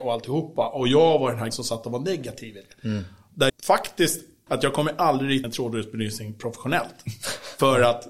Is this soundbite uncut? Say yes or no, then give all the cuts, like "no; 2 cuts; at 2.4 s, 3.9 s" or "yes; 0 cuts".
no; 4 cuts; at 1.5 s, 3.5 s, 4.5 s, 5.4 s